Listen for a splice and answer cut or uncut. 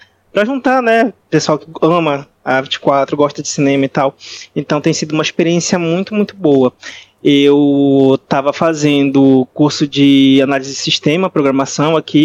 uncut